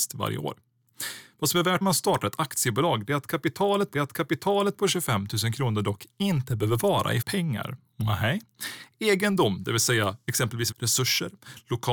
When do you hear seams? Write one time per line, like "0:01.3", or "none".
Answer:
0:01.8
0:03.9
0:07.2
0:10.7